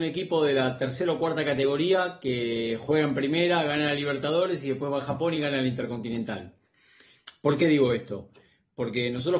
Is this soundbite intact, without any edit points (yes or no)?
yes